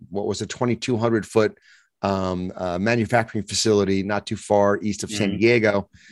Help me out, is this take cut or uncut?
uncut